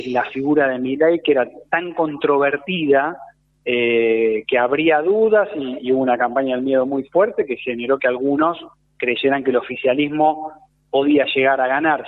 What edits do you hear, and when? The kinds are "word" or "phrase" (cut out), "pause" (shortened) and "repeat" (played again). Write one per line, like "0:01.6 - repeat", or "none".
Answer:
none